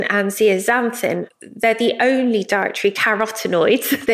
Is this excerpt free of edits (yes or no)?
yes